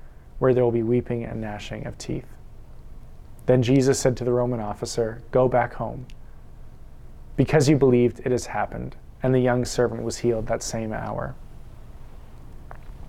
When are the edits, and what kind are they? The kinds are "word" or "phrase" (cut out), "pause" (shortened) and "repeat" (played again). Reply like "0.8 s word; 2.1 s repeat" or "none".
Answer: none